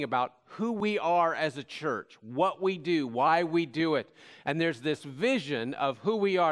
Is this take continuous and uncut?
yes; 0 cuts

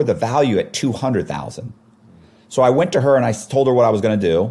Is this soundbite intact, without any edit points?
yes; 0 cuts

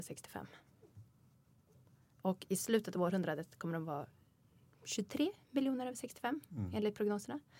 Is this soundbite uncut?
yes; 0 cuts

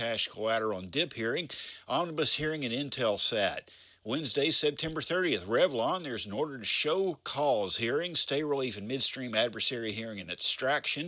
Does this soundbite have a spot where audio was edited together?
no; 0 cuts

